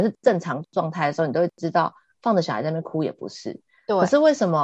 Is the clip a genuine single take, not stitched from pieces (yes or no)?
yes